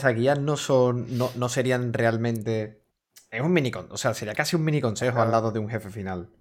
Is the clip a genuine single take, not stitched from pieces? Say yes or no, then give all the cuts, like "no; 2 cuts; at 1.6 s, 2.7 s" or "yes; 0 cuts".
yes; 0 cuts